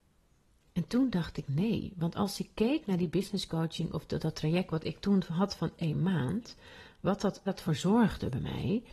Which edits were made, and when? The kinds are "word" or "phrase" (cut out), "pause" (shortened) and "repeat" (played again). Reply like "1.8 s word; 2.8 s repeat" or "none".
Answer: 7.5 s word